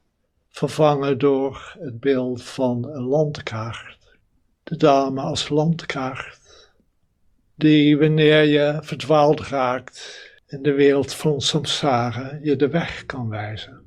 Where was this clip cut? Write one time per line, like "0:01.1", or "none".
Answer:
0:04.3
0:06.9

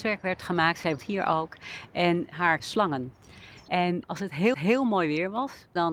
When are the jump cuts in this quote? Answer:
0:01.0
0:02.6
0:04.5

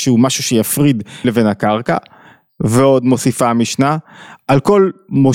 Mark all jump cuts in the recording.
0:01.2

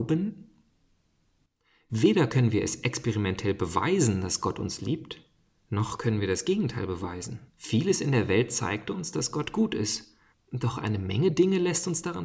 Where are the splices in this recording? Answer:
0:07.5
0:10.3

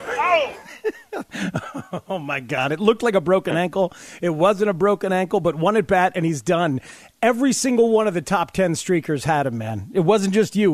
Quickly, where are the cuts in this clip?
none

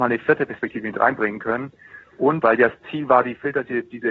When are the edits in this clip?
0:02.4

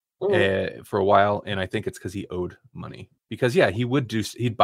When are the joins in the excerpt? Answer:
0:03.2

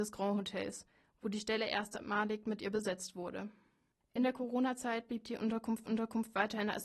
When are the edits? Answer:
0:05.9

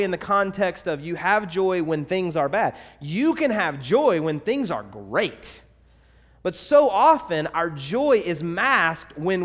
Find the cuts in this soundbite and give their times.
none

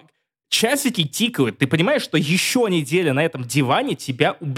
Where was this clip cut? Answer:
none

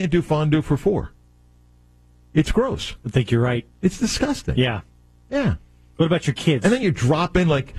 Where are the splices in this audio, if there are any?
none

